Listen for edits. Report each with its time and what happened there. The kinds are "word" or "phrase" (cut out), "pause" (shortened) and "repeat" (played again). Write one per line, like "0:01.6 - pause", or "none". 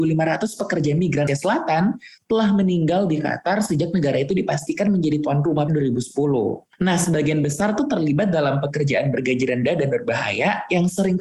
0:01.3 - word
0:05.7 - phrase